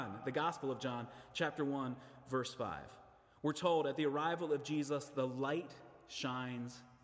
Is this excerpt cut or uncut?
uncut